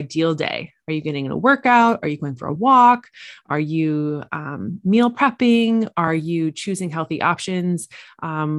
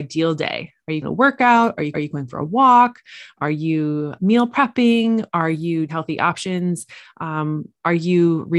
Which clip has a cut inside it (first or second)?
second